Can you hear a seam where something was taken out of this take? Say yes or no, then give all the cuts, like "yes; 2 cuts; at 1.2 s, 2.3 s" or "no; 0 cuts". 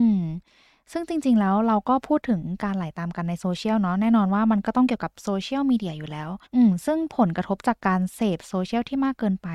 yes; 1 cut; at 6.5 s